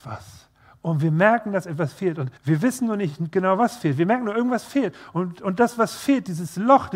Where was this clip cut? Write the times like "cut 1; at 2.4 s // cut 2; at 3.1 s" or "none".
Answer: cut 1; at 2.4 s